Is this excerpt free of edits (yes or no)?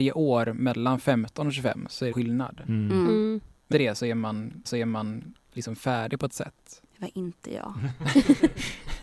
no